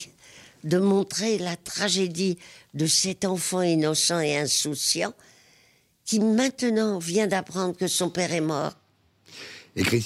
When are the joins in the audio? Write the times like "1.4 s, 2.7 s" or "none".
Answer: none